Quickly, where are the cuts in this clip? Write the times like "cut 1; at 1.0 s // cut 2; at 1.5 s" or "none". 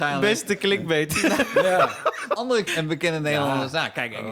cut 1; at 2.4 s // cut 2; at 2.7 s